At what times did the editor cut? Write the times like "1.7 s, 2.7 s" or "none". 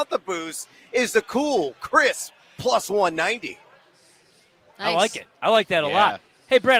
none